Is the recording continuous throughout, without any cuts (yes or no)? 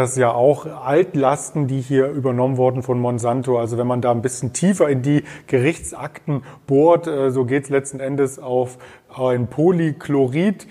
yes